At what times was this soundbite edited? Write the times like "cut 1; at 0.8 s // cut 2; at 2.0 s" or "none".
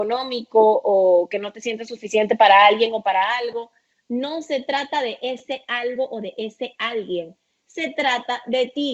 none

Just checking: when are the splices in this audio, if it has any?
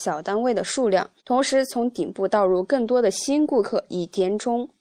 cut 1; at 1.2 s

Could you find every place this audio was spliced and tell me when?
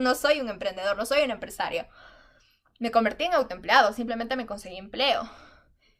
none

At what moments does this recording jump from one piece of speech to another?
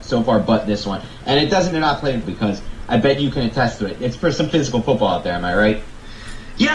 cut 1; at 1.7 s // cut 2; at 2.2 s // cut 3; at 4.5 s

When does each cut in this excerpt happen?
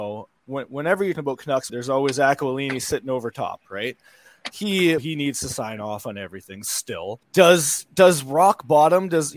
cut 1; at 1.1 s // cut 2; at 1.7 s // cut 3; at 5.0 s // cut 4; at 7.2 s

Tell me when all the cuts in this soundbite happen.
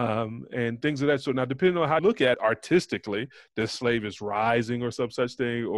cut 1; at 2.0 s // cut 2; at 2.3 s

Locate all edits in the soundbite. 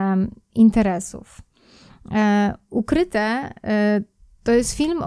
none

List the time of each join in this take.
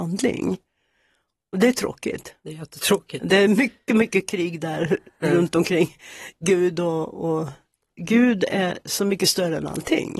none

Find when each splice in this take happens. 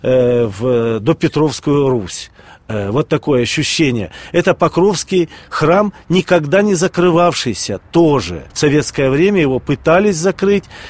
cut 1; at 8.5 s

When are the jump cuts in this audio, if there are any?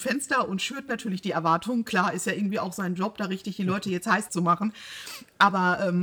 cut 1; at 4.3 s

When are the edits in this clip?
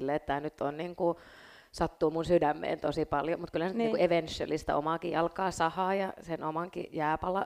none

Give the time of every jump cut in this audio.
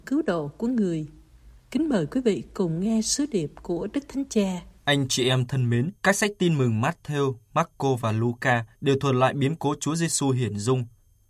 cut 1; at 1.6 s // cut 2; at 4.8 s // cut 3; at 6.0 s // cut 4; at 8.7 s

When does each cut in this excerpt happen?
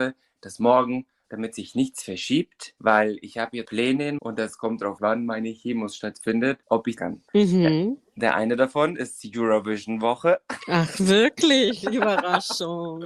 cut 1; at 1.3 s // cut 2; at 3.6 s // cut 3; at 4.2 s // cut 4; at 5.0 s // cut 5; at 7.0 s // cut 6; at 7.3 s

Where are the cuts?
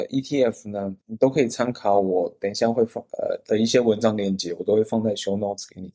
cut 1; at 1.0 s // cut 2; at 3.1 s

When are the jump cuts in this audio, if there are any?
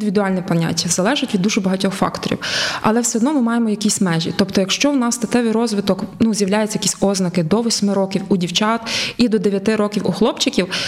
none

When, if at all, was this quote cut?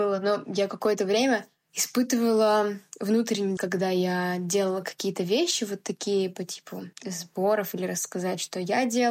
cut 1; at 3.6 s // cut 2; at 6.9 s

